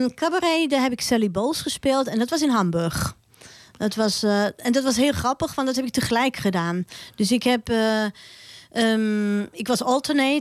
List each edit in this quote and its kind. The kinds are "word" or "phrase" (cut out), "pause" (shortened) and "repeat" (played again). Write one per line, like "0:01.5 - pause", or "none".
none